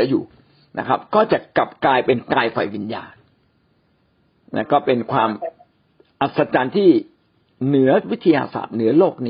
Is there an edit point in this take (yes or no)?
no